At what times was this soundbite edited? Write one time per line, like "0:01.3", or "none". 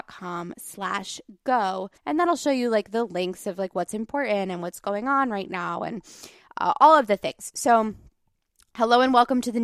0:02.0